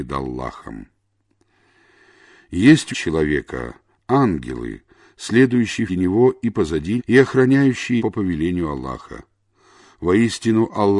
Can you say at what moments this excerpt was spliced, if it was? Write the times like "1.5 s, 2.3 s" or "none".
2.9 s, 5.9 s, 7.0 s, 8.0 s